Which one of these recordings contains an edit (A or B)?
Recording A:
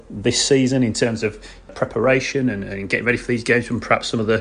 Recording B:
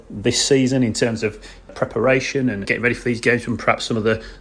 B